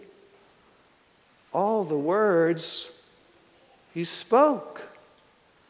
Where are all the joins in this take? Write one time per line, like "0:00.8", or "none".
none